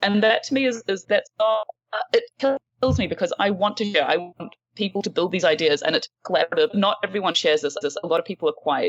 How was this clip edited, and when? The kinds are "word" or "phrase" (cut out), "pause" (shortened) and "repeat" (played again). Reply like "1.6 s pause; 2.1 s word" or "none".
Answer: 1.0 s word; 6.7 s phrase; 7.8 s repeat